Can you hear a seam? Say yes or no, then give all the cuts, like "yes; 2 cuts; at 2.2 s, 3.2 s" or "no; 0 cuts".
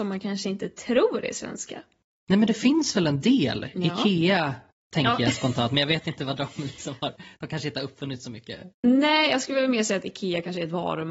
no; 0 cuts